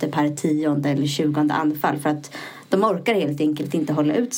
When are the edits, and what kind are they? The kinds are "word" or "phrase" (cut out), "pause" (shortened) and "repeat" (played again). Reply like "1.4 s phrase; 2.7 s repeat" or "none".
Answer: none